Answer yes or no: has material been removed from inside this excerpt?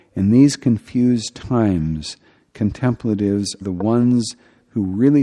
yes